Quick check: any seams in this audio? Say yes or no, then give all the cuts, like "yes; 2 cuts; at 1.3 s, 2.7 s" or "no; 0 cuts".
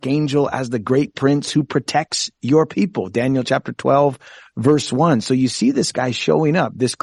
no; 0 cuts